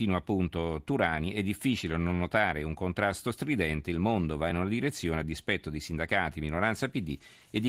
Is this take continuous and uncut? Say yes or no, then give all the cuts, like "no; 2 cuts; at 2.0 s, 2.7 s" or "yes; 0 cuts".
yes; 0 cuts